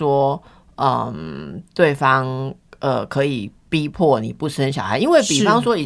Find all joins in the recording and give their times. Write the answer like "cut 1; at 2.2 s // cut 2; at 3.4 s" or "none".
none